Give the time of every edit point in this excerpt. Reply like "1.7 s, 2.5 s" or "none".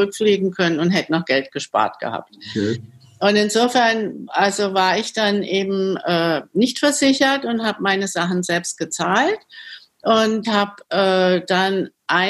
10.4 s